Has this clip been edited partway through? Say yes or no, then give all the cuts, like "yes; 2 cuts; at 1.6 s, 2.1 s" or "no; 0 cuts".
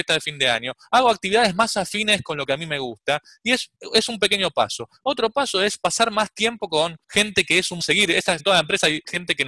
yes; 4 cuts; at 3.7 s, 7.0 s, 7.8 s, 8.4 s